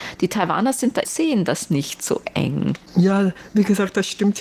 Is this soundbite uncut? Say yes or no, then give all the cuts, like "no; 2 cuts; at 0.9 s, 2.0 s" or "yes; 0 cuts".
no; 1 cut; at 1.0 s